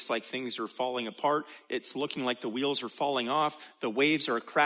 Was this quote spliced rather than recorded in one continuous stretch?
no; 0 cuts

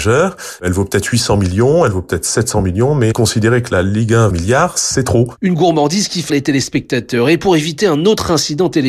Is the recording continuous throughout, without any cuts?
no; 2 cuts; at 4.3 s, 6.3 s

